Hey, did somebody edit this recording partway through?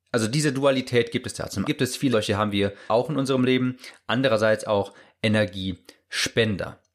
yes; 3 cuts; at 1.6 s, 2.1 s, 2.9 s

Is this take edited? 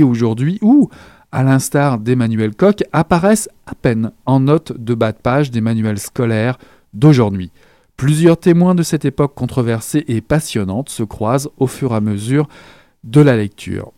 no; 0 cuts

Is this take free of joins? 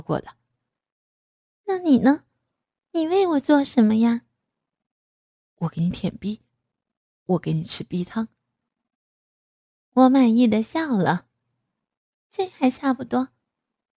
no; 1 cut; at 12.1 s

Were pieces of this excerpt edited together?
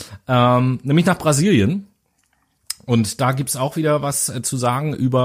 no; 0 cuts

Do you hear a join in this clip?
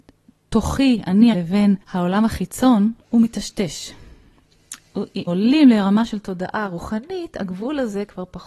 yes; 4 cuts; at 1.3 s, 1.8 s, 3.0 s, 5.3 s

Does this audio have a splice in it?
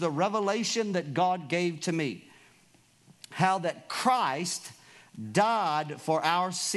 no; 0 cuts

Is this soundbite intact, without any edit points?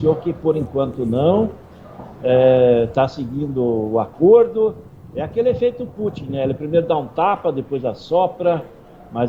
yes; 0 cuts

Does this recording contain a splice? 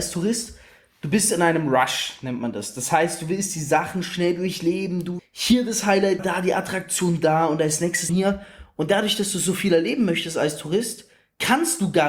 yes; 3 cuts; at 5.2 s, 6.2 s, 8.1 s

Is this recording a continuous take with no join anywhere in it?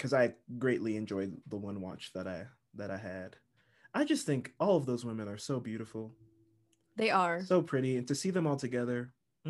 yes; 0 cuts

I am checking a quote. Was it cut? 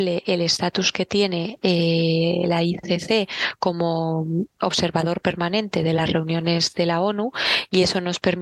no; 0 cuts

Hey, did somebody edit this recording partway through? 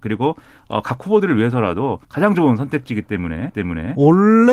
yes; 2 cuts; at 2.0 s, 3.5 s

